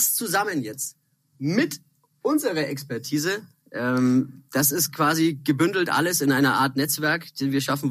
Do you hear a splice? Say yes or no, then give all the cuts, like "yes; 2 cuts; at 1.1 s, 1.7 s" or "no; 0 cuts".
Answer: no; 0 cuts